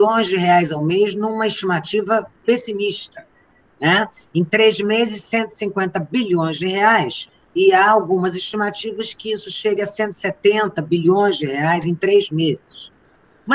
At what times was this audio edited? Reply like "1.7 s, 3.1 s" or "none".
none